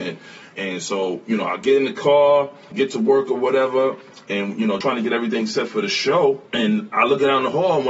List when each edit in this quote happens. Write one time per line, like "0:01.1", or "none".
0:02.7
0:04.8
0:06.5